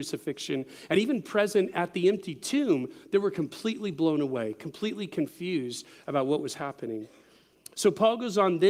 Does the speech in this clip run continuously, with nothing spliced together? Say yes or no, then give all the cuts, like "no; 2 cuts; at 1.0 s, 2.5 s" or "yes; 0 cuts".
yes; 0 cuts